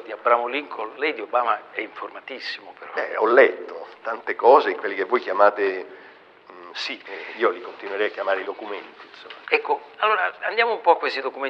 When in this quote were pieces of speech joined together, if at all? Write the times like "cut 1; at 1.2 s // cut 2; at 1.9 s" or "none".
cut 1; at 7.0 s // cut 2; at 8.4 s // cut 3; at 9.4 s